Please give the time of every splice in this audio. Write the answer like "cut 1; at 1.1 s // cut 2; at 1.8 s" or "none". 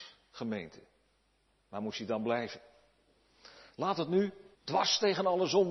cut 1; at 4.6 s